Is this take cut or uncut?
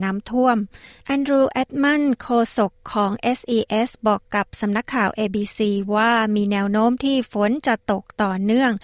uncut